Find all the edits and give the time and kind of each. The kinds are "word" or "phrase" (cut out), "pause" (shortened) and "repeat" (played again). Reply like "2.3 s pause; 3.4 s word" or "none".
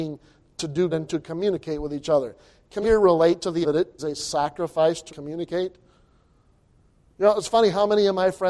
0.9 s word; 2.8 s word; 3.6 s word; 4.0 s word; 5.1 s word